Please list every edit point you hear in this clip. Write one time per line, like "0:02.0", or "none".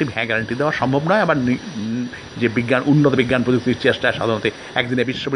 none